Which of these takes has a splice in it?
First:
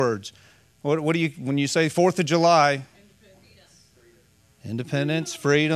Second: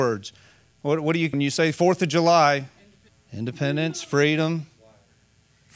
second; 2 cuts; at 1.3 s, 3.1 s

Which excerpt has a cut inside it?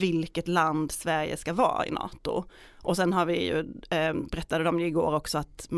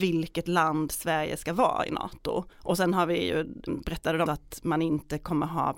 second; 3 cuts; at 2.5 s, 3.7 s, 4.3 s

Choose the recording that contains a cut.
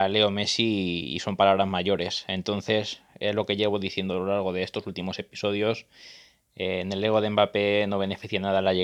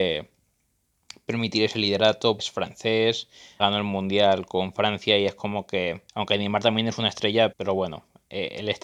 second; 4 cuts; at 2.4 s, 3.6 s, 6.1 s, 7.5 s

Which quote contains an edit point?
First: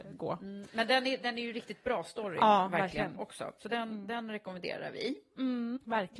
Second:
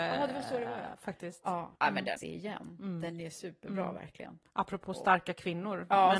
second; 2 cuts; at 1.8 s, 2.2 s

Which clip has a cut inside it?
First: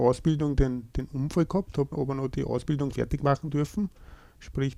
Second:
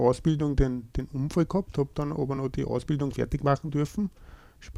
first; 1 cut; at 1.9 s

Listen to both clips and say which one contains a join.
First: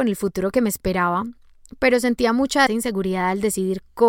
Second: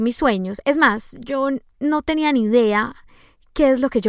first; 1 cut; at 2.7 s

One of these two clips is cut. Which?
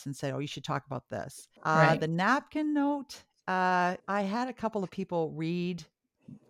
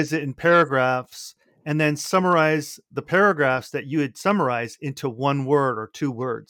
first; 2 cuts; at 1.6 s, 4.0 s

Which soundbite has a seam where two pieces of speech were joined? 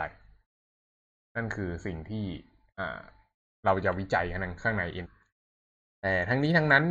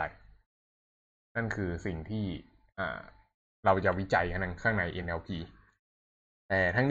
first; 1 cut; at 5.0 s

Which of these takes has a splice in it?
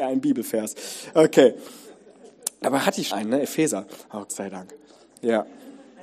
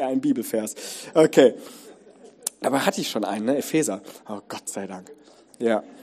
first; 2 cuts; at 3.1 s, 4.3 s

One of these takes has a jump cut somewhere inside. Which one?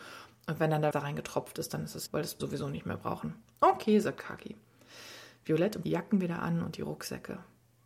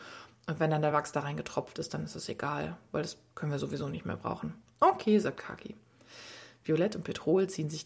first; 4 cuts; at 0.9 s, 2.1 s, 2.4 s, 5.8 s

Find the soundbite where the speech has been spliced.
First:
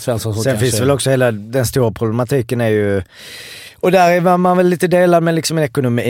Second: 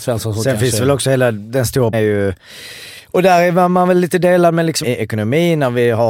second; 2 cuts; at 1.9 s, 4.8 s

